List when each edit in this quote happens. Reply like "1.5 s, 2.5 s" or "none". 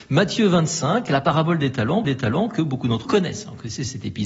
2.0 s, 3.1 s